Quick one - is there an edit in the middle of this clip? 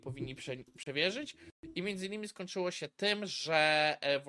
no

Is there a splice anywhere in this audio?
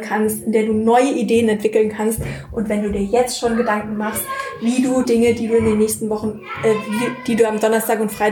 yes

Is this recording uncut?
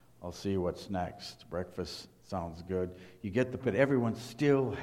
no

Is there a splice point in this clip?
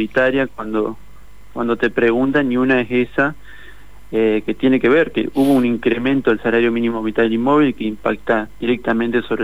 no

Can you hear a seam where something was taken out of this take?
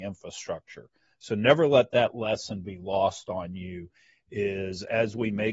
no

